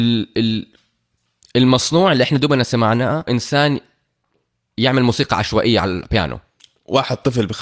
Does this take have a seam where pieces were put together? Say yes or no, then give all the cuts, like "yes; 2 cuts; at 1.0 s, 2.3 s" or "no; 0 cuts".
yes; 1 cut; at 3.3 s